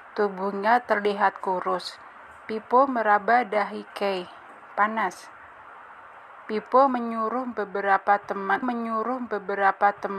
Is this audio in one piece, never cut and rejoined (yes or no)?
no